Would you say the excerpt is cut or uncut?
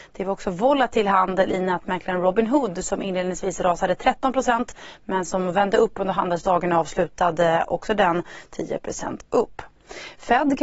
uncut